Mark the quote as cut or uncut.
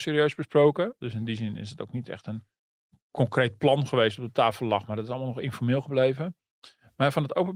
uncut